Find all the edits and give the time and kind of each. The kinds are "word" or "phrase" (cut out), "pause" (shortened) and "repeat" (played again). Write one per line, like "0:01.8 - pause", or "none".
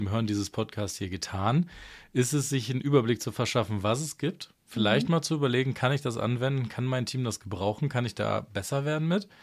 0:04.6 - pause